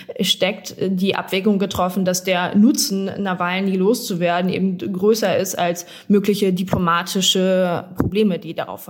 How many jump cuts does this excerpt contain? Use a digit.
0